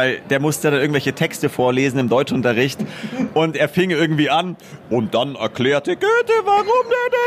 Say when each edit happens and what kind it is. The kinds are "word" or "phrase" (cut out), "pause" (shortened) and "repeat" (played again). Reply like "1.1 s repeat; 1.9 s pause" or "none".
none